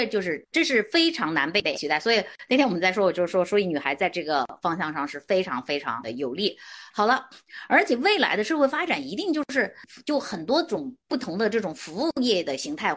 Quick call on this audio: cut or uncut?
cut